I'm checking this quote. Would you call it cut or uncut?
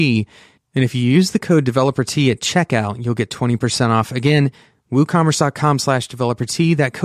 uncut